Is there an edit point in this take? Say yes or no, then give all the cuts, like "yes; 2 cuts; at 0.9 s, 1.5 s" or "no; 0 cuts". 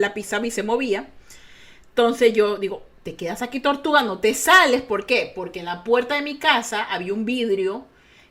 no; 0 cuts